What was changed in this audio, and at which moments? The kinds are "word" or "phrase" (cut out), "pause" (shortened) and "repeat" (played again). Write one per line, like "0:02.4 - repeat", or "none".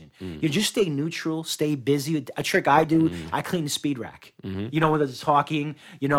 none